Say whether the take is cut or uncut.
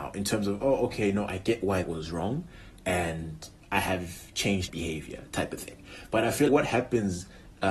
cut